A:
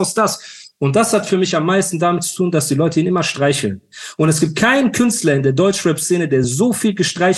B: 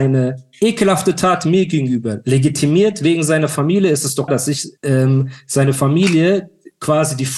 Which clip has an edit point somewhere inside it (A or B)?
B